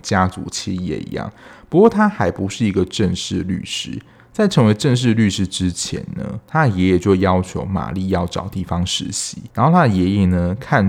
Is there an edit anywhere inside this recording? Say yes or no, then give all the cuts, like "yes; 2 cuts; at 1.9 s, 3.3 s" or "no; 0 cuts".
yes; 1 cut; at 9.5 s